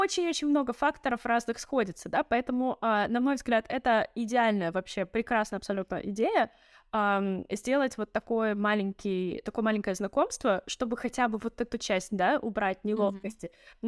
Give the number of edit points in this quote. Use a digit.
0